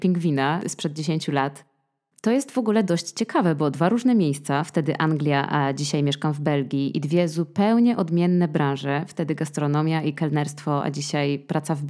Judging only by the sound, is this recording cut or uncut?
uncut